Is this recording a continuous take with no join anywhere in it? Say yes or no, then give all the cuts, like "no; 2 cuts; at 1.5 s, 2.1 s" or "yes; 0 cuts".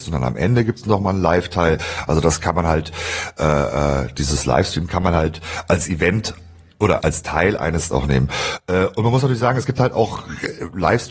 no; 2 cuts; at 7.0 s, 7.9 s